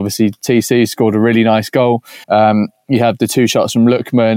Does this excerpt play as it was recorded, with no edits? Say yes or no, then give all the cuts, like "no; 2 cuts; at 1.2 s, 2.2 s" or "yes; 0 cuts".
no; 1 cut; at 2.2 s